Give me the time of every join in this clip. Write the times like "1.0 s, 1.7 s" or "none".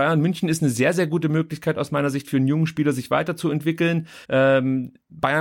4.2 s